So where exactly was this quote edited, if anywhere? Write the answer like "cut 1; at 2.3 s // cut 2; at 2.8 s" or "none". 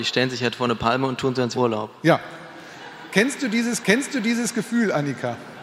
cut 1; at 1.5 s // cut 2; at 3.8 s